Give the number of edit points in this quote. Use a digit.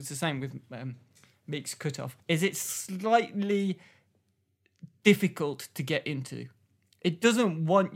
1